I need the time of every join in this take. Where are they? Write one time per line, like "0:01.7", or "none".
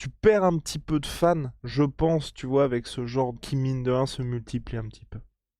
0:03.4

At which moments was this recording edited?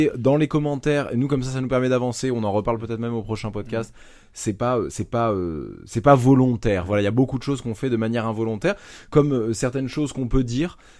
none

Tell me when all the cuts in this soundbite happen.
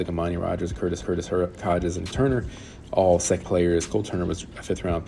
0:01.0
0:02.1
0:03.4

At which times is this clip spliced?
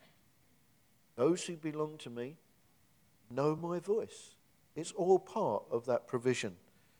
none

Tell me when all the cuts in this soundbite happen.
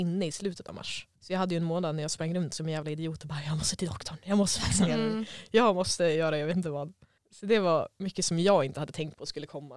0:01.1
0:07.2

